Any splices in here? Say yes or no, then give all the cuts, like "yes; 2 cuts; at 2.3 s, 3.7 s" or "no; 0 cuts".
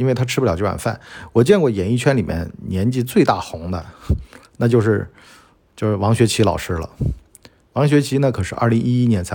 no; 0 cuts